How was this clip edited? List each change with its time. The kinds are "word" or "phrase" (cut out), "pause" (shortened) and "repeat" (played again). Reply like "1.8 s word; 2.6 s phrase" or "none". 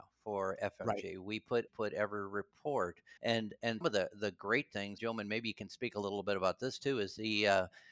1.7 s phrase; 3.2 s pause; 3.8 s word; 5.0 s phrase